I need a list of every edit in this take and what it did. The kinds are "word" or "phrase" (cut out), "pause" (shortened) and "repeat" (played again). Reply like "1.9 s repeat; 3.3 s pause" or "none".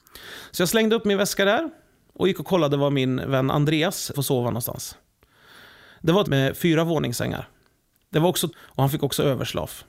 4.1 s word; 6.2 s phrase; 8.5 s word